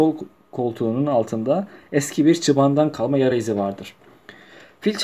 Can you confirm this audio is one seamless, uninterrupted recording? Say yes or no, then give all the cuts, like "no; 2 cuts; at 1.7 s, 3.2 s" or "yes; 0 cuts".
yes; 0 cuts